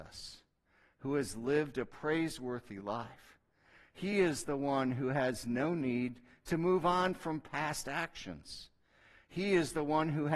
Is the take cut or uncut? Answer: uncut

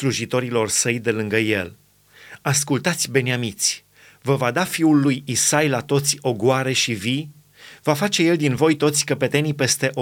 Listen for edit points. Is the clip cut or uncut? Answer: uncut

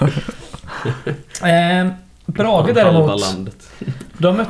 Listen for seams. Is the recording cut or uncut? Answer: uncut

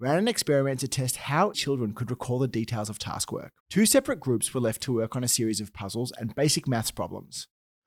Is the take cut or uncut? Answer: cut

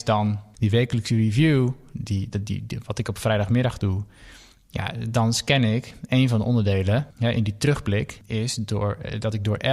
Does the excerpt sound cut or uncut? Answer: uncut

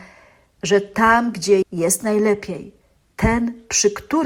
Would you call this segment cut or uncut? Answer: cut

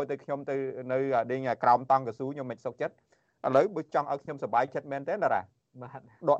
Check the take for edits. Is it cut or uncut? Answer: uncut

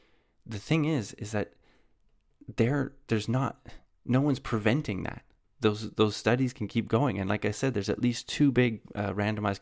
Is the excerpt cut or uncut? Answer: cut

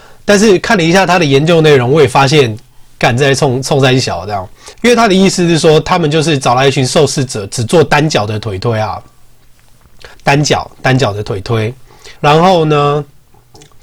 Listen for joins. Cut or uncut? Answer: cut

